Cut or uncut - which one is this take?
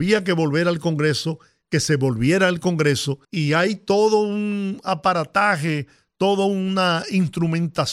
cut